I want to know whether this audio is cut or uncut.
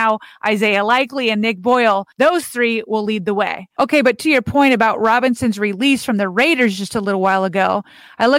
cut